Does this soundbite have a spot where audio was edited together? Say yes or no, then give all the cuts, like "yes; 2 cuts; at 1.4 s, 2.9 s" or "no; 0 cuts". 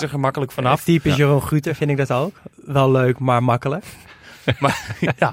yes; 1 cut; at 2.5 s